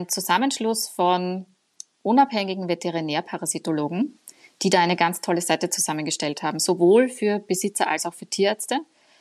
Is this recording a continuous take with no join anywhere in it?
yes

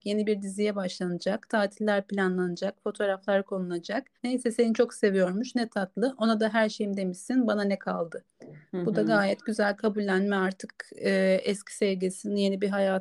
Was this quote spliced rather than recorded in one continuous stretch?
yes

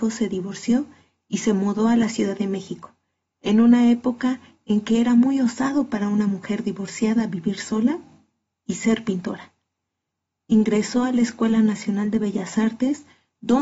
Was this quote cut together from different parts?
no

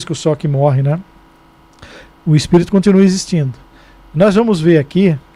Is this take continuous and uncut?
yes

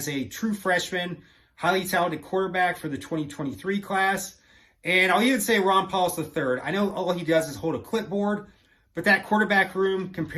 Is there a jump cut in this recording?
no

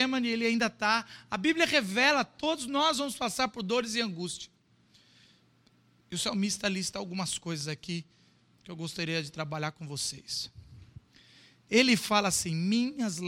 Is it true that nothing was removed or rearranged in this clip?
yes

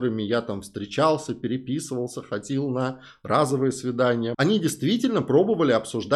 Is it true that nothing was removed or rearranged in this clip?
no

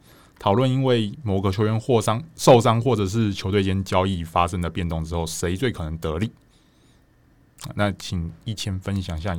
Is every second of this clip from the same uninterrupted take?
yes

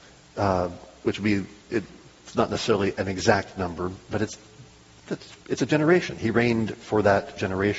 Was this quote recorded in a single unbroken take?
yes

